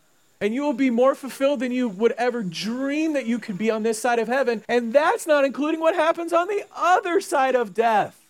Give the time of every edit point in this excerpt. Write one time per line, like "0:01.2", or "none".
0:04.6